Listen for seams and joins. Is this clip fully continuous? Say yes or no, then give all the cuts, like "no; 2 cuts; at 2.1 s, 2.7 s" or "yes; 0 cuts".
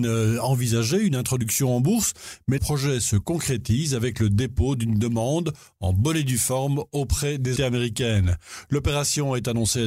no; 2 cuts; at 2.6 s, 7.6 s